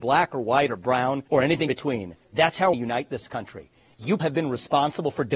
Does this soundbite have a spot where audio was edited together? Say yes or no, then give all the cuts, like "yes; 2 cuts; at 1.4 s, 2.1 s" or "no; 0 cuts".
yes; 5 cuts; at 1.3 s, 1.7 s, 2.2 s, 2.7 s, 4.2 s